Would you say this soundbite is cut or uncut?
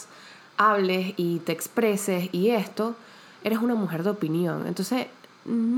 uncut